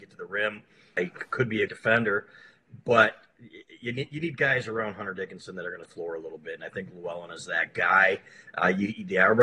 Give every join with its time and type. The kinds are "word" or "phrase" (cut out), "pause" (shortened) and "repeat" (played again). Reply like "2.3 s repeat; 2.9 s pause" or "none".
1.0 s word; 1.7 s word; 5.8 s phrase